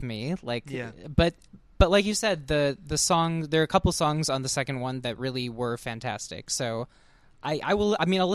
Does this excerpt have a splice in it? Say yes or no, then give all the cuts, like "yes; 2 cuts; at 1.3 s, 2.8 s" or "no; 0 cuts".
no; 0 cuts